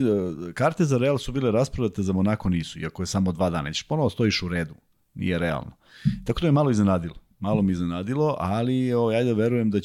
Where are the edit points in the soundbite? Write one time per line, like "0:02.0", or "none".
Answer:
none